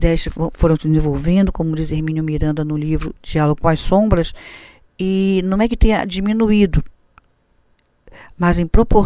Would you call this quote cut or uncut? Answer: uncut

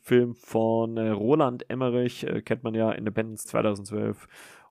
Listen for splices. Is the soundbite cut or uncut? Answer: cut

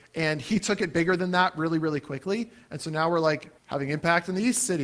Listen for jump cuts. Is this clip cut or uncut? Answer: cut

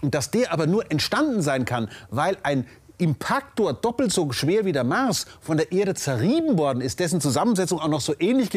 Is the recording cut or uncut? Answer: uncut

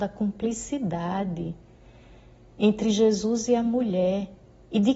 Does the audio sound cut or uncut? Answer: uncut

